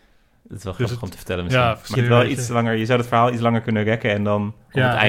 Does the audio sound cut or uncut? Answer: cut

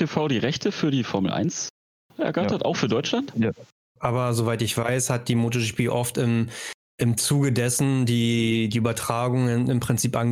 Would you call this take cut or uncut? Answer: uncut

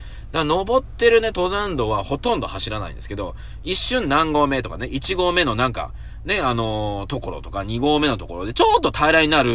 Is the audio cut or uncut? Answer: uncut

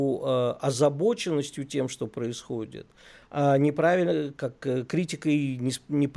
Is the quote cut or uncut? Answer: uncut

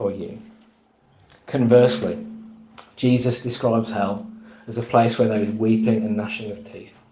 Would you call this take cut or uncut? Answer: uncut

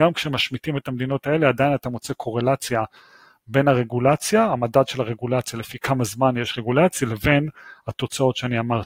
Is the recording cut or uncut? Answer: uncut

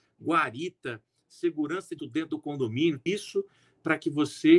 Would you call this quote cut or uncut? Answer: cut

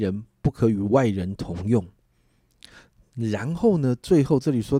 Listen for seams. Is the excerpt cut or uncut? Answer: uncut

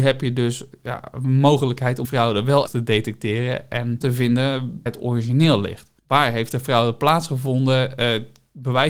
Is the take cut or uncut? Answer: cut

